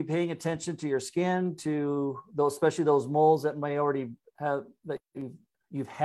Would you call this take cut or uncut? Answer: uncut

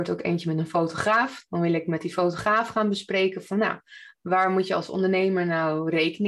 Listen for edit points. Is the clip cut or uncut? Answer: uncut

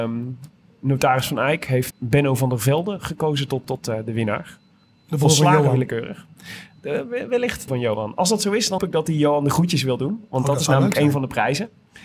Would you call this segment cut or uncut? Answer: cut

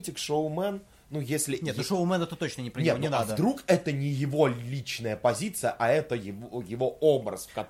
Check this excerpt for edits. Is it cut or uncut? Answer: uncut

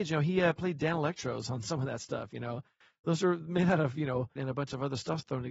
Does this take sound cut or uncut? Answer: cut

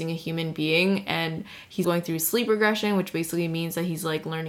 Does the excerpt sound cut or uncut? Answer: cut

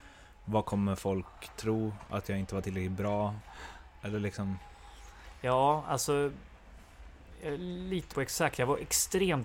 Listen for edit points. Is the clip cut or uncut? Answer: cut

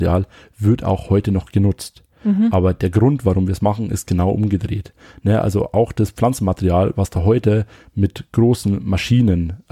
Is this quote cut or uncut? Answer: uncut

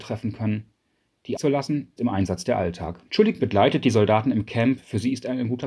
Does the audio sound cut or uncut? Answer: cut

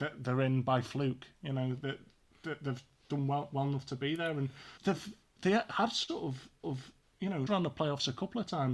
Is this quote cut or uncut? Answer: cut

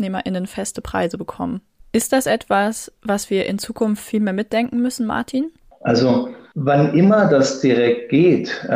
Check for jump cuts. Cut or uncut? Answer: cut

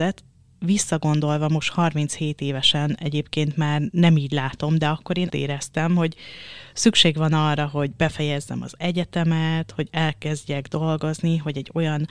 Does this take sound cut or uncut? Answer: cut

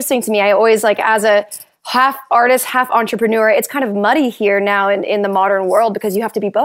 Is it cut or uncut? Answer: uncut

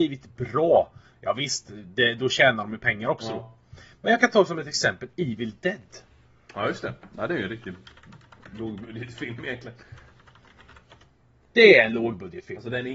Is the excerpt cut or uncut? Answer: uncut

